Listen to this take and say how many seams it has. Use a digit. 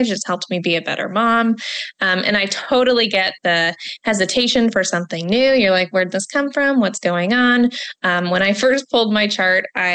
1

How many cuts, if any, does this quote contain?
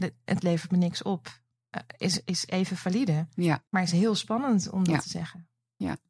1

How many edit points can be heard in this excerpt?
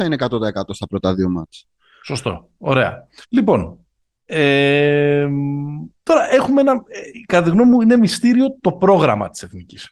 2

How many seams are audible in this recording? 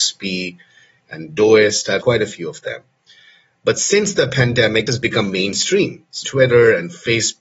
3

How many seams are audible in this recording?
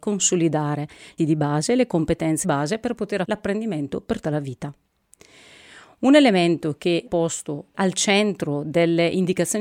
6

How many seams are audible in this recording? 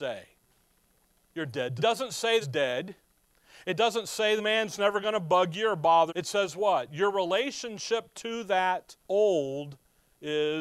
5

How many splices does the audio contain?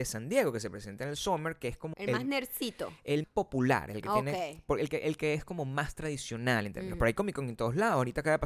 2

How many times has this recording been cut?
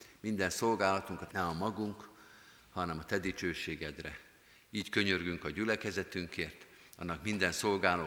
1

